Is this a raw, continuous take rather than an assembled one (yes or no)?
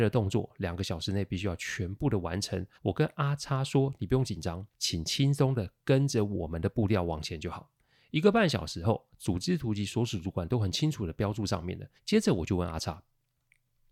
no